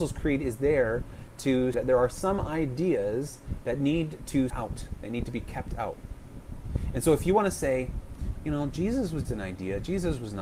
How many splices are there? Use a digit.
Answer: 3